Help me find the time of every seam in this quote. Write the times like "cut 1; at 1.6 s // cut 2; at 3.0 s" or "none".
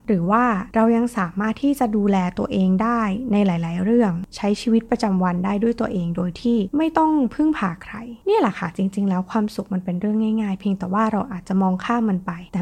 none